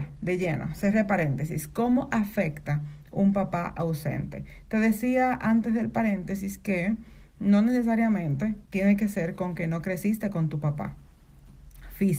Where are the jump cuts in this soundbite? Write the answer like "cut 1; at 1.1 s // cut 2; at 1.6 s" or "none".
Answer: cut 1; at 8.7 s